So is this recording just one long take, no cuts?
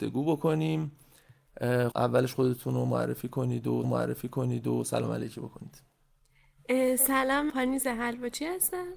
no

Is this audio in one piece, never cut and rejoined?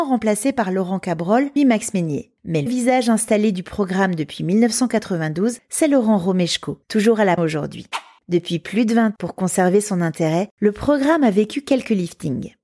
no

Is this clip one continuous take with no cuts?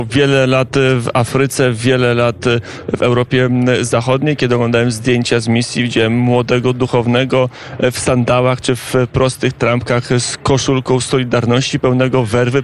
yes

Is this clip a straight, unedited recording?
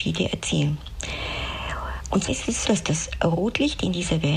no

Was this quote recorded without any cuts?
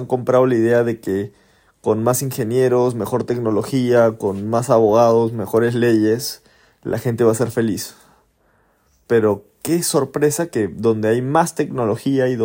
yes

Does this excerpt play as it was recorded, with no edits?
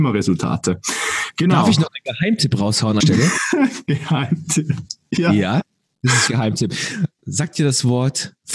no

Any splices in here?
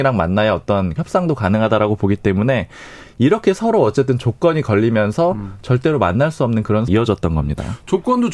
yes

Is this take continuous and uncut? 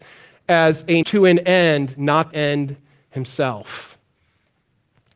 no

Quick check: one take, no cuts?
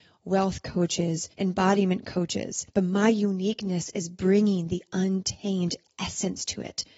no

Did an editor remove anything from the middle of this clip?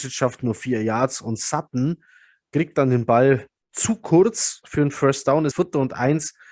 yes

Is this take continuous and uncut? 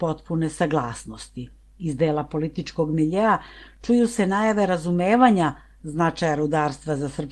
yes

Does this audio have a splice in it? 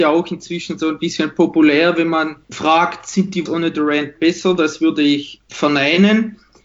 yes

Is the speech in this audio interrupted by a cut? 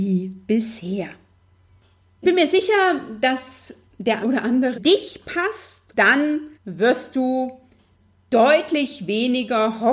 yes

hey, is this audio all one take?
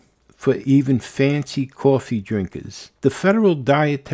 no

